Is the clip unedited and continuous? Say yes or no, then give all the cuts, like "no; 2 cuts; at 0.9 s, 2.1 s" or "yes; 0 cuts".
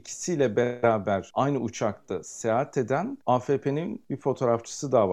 yes; 0 cuts